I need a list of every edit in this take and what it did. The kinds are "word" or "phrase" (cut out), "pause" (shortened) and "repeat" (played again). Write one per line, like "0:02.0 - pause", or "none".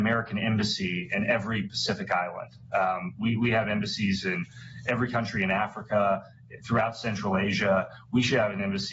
none